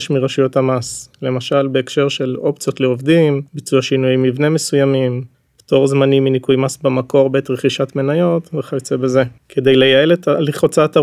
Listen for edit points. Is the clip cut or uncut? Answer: cut